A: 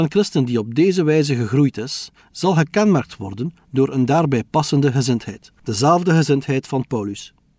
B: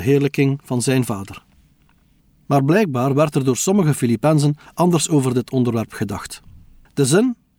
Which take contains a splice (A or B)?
A